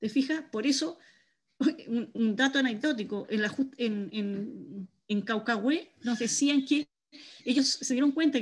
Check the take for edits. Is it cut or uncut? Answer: cut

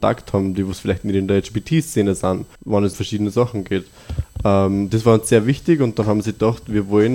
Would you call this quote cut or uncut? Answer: cut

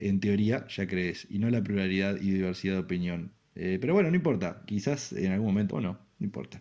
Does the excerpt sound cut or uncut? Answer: cut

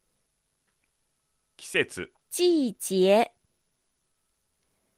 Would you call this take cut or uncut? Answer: cut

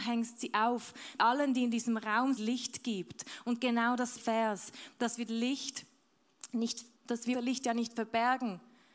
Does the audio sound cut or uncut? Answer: cut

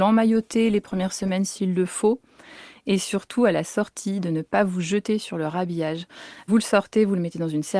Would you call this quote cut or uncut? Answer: uncut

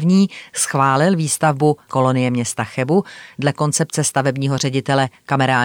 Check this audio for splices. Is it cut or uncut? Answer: cut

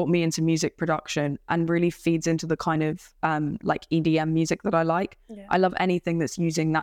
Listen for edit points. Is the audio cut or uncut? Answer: uncut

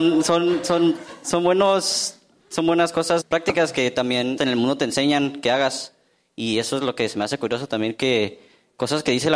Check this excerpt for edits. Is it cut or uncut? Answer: cut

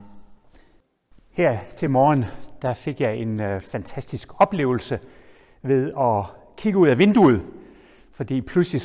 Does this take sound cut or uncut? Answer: uncut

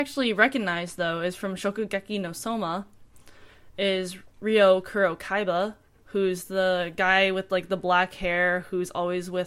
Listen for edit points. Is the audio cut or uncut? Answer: uncut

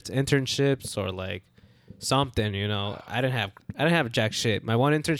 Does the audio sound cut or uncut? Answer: uncut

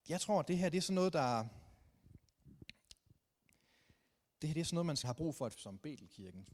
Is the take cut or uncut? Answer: cut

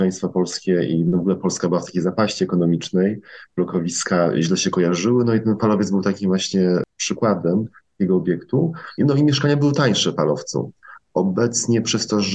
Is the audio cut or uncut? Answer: uncut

